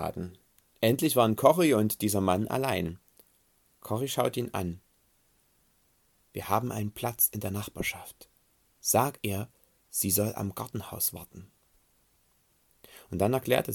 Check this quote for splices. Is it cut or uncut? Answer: uncut